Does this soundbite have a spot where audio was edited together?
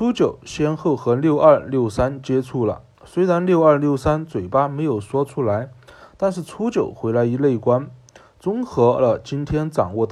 no; 0 cuts

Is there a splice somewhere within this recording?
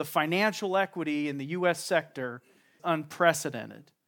yes; 1 cut; at 2.8 s

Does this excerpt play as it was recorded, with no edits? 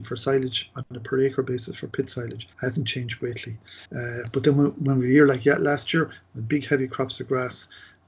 no; 2 cuts; at 2.5 s, 3.9 s

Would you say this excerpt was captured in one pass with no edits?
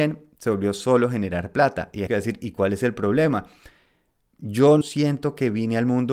no; 2 cuts; at 2.1 s, 4.8 s

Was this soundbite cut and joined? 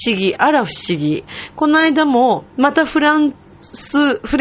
yes; 1 cut; at 2.5 s

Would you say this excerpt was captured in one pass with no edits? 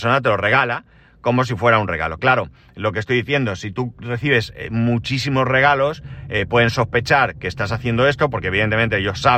yes; 0 cuts

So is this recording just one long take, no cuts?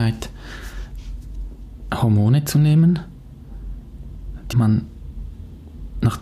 no; 1 cut; at 4.5 s

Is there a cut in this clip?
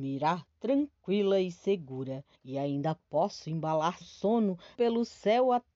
yes; 3 cuts; at 2.3 s, 4.0 s, 4.7 s

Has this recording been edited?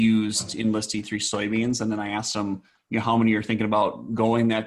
no; 0 cuts

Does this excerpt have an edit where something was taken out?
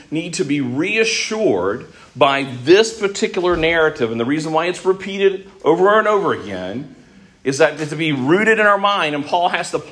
no; 0 cuts

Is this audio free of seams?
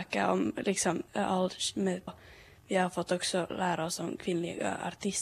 no; 2 cuts; at 1.1 s, 2.1 s

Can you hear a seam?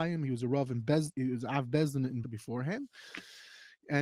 yes; 2 cuts; at 1.1 s, 2.2 s

